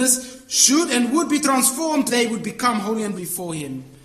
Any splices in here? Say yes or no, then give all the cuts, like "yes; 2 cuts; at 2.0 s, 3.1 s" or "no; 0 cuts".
yes; 2 cuts; at 2.1 s, 3.2 s